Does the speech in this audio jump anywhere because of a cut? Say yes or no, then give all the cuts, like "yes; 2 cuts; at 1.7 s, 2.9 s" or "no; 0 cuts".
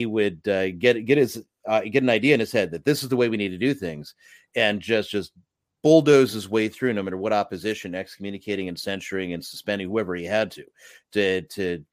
no; 0 cuts